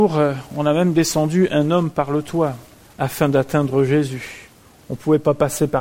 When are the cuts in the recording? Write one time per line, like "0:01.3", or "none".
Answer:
0:02.8